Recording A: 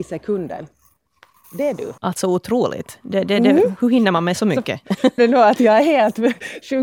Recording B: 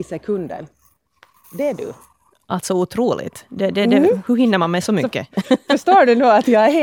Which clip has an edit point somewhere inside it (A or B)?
A